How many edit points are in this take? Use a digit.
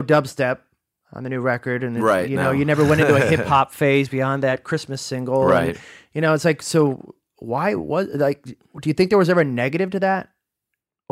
0